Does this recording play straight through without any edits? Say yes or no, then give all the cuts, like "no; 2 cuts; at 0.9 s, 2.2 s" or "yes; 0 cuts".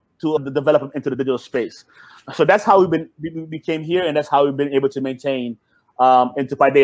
yes; 0 cuts